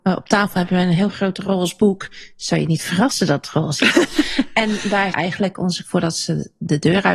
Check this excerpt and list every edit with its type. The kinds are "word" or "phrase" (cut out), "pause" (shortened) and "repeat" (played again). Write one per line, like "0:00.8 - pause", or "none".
0:05.1 - word
0:05.8 - word